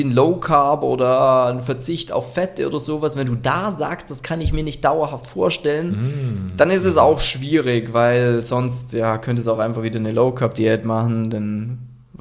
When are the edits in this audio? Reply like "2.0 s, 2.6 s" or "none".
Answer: none